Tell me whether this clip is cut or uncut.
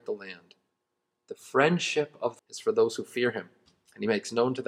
cut